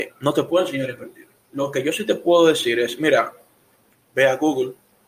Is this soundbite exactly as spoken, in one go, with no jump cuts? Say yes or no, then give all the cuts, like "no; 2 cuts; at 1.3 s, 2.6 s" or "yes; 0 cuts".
yes; 0 cuts